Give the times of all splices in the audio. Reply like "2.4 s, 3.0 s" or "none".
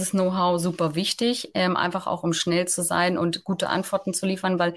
none